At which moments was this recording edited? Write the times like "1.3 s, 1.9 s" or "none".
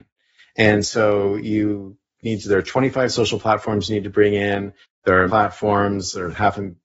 5.3 s